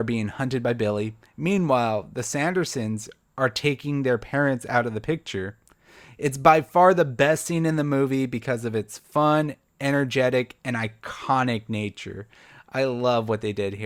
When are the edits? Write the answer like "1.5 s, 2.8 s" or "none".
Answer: none

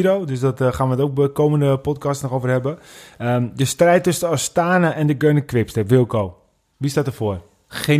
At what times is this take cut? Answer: none

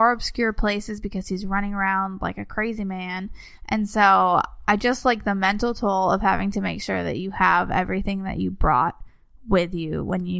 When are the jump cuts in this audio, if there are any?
none

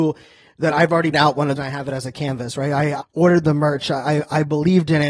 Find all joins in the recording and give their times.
1.1 s, 1.6 s, 3.0 s

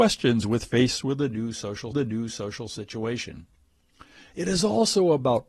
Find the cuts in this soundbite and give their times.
1.9 s

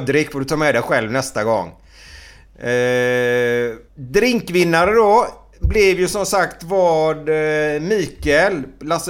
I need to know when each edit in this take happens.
3.9 s

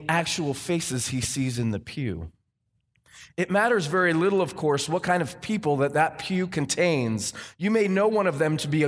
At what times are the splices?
none

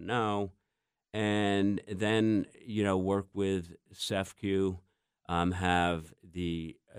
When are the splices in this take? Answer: none

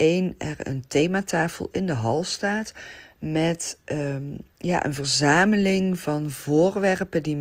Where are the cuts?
4.5 s

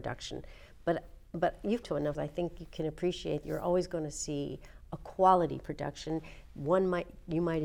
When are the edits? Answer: 1.8 s, 2.1 s, 3.4 s

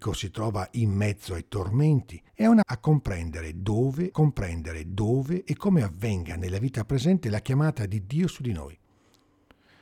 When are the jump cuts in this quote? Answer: 2.3 s, 2.6 s, 4.1 s

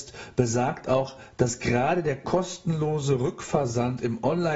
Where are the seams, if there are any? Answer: none

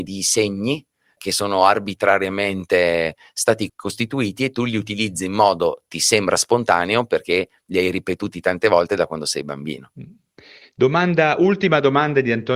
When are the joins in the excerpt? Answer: 1.2 s, 3.7 s

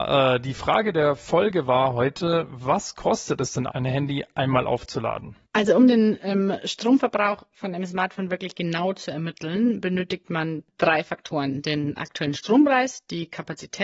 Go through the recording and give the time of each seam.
3.7 s, 5.4 s

